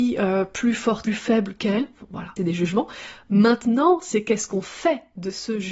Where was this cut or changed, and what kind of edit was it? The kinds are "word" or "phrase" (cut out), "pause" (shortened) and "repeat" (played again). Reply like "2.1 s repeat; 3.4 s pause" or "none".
1.1 s phrase; 2.4 s phrase